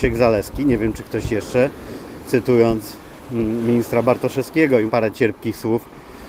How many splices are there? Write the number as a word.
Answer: one